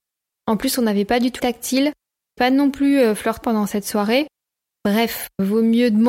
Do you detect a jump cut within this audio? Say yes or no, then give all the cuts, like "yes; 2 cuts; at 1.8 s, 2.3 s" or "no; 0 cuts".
yes; 3 cuts; at 1.4 s, 2.4 s, 3.4 s